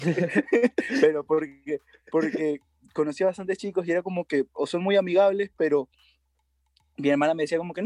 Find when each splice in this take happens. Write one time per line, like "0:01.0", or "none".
none